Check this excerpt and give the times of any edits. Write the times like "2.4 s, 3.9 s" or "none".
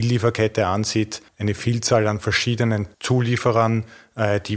1.3 s, 2.9 s